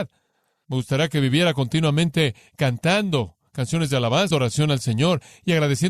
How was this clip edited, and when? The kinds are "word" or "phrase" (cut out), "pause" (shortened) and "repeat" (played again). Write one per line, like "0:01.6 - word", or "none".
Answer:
0:04.3 - word